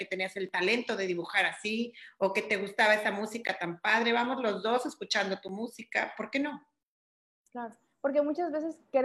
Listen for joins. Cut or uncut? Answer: uncut